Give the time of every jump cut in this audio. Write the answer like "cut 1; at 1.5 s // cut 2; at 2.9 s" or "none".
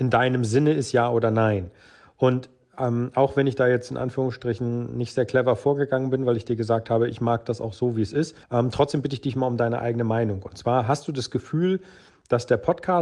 cut 1; at 8.4 s